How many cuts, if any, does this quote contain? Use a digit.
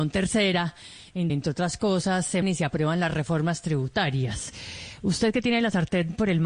2